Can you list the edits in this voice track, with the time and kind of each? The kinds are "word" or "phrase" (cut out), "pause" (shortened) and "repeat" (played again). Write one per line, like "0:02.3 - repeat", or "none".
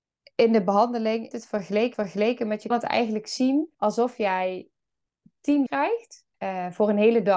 0:01.3 - word
0:01.9 - repeat
0:02.7 - word
0:03.7 - pause
0:05.7 - word
0:06.3 - pause

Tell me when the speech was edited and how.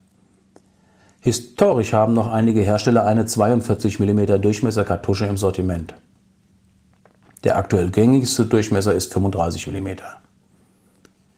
none

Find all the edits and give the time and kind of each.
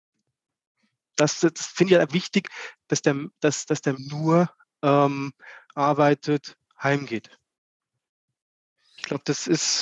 0:02.1 - word
0:03.3 - pause
0:03.9 - phrase
0:05.7 - word

